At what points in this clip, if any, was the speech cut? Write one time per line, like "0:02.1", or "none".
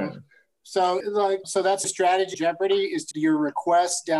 0:01.0
0:01.4
0:01.8
0:02.3
0:03.1

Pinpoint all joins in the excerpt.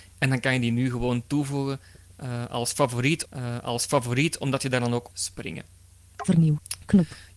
0:03.3
0:05.1

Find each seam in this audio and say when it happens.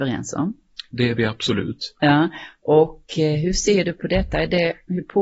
none

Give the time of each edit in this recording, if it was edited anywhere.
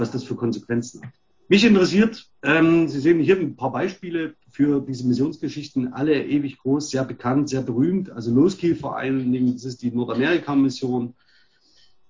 0:01.3

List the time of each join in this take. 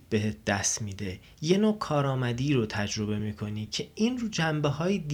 none

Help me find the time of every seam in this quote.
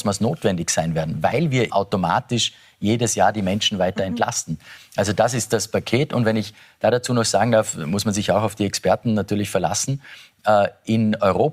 0:01.7

